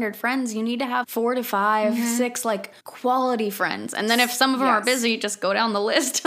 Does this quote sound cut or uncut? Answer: cut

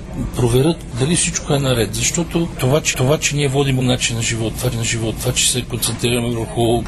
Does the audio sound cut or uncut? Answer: cut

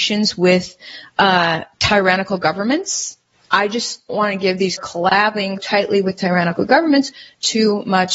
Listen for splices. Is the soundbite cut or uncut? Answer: cut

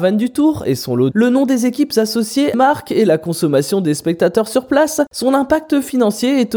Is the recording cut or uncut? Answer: cut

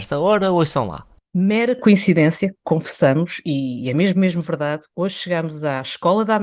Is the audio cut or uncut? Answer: uncut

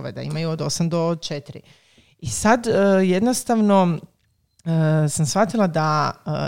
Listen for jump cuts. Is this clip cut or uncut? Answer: uncut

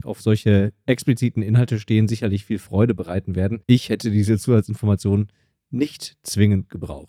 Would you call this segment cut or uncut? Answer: uncut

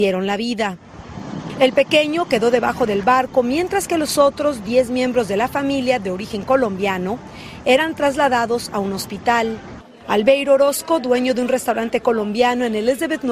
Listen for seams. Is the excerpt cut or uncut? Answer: uncut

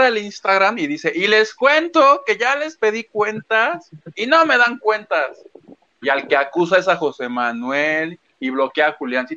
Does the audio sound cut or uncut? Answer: uncut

